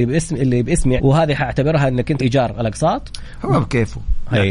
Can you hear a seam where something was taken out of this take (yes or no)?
yes